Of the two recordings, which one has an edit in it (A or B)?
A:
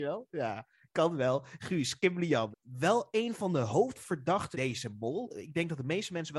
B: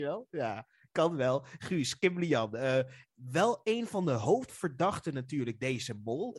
A